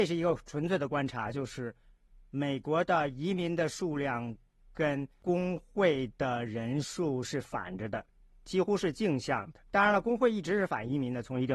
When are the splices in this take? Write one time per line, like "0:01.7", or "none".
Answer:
0:09.7

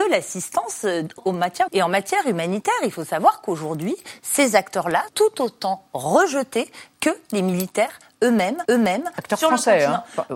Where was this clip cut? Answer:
0:01.2
0:01.7
0:05.1
0:08.7

